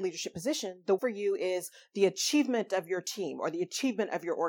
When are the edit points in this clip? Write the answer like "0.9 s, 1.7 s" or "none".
1.0 s